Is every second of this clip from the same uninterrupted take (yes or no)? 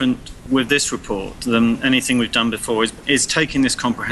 yes